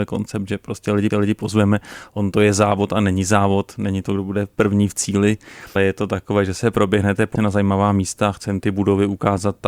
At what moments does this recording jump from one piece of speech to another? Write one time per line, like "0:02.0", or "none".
0:01.1
0:05.8
0:07.4